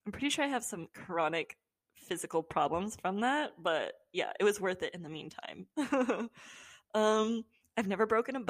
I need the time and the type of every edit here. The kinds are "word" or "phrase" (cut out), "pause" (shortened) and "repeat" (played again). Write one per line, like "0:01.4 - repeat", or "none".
none